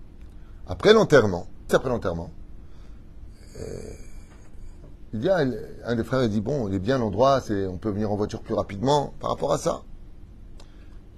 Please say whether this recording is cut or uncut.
cut